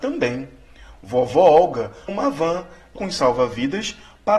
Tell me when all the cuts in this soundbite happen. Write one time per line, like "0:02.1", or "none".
0:02.1
0:03.0